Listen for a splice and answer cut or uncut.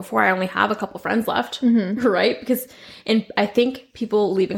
uncut